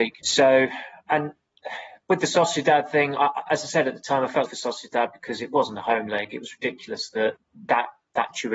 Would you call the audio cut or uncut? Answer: cut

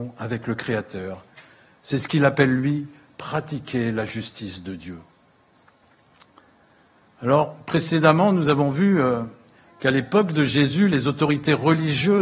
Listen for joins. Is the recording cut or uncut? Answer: uncut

